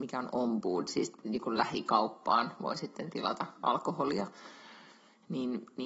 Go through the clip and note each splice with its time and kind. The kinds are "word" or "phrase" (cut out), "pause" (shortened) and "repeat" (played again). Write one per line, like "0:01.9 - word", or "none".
none